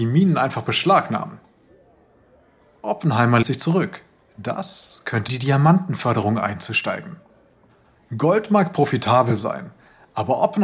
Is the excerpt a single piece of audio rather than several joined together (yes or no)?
no